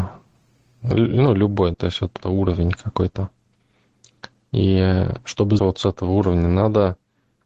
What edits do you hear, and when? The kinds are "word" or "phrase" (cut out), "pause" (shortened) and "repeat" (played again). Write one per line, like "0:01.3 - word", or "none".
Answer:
0:01.7 - word
0:02.2 - word
0:05.6 - word